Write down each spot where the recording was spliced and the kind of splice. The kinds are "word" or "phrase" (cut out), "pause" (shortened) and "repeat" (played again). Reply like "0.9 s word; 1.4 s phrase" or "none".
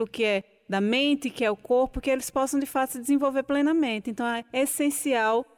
none